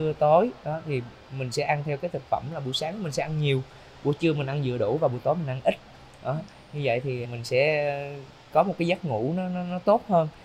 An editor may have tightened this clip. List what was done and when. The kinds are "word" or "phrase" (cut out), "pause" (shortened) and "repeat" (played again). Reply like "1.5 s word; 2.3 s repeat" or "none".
7.2 s word

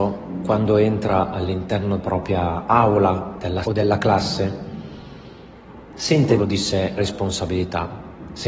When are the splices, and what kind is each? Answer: 2.0 s word; 3.6 s word; 6.4 s word; 7.0 s word

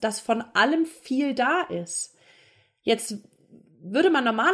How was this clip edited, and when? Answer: none

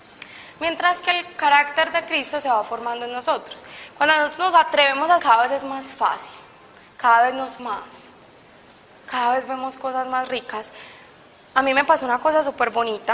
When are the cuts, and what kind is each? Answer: 5.2 s word; 7.6 s word

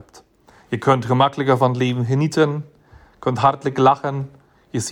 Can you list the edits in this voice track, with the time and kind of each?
none

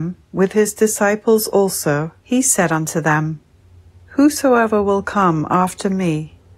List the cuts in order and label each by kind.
2.2 s pause; 3.6 s pause

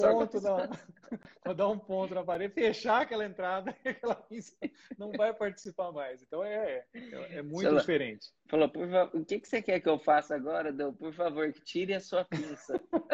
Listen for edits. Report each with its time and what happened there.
8.4 s pause

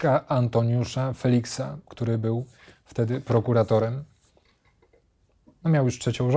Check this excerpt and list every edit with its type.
none

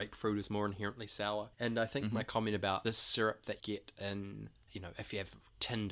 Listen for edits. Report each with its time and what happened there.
1.5 s pause; 2.8 s phrase; 3.6 s word; 4.7 s word

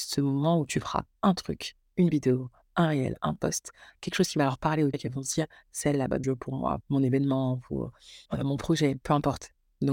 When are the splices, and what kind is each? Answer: 4.9 s word; 6.2 s phrase; 6.8 s word; 8.3 s pause

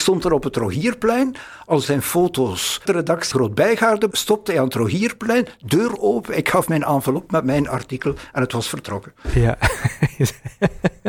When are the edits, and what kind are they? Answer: 1.8 s word; 2.9 s word; 3.3 s word; 4.1 s word

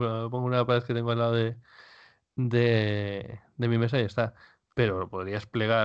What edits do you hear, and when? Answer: none

